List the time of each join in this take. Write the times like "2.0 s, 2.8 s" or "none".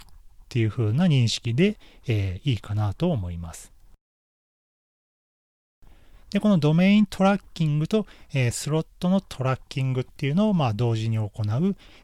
none